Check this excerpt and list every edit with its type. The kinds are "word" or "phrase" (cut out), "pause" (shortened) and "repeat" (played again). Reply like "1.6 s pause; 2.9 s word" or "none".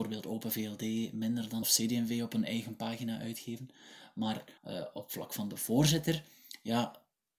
1.6 s phrase; 4.6 s pause